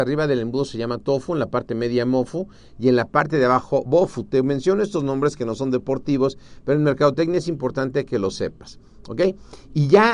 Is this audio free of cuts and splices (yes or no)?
yes